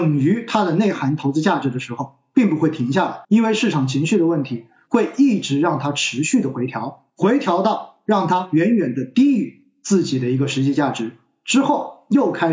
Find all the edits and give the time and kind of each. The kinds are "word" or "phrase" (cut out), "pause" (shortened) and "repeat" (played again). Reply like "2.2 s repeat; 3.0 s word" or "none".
3.2 s pause; 7.1 s pause